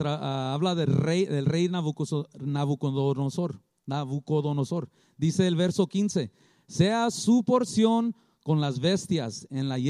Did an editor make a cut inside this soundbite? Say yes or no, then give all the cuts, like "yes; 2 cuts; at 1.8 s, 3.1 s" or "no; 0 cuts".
no; 0 cuts